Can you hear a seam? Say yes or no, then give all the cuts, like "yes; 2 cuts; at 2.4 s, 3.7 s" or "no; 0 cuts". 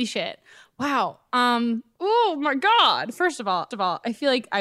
yes; 1 cut; at 3.7 s